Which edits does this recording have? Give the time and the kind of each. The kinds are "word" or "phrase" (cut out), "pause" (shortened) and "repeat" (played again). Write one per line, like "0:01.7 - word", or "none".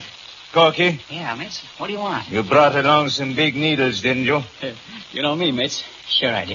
0:01.0 - pause